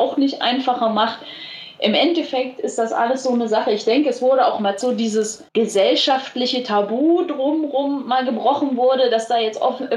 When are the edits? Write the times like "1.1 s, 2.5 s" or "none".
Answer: 4.8 s, 5.5 s